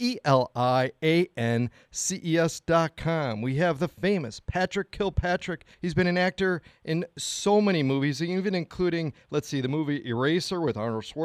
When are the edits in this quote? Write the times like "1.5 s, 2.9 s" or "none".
5.7 s